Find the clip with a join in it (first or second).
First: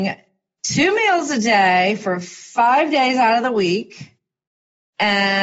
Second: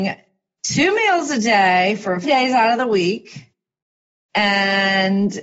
second